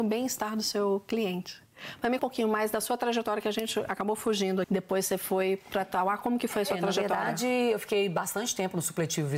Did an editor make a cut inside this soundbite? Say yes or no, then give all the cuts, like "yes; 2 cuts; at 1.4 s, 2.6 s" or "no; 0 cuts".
yes; 2 cuts; at 2.2 s, 4.6 s